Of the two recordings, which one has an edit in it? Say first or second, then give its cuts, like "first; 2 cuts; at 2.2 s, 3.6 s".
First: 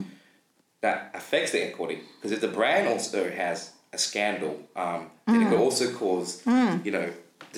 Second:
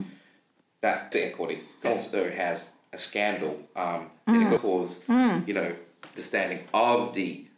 second; 3 cuts; at 1.1 s, 1.8 s, 4.6 s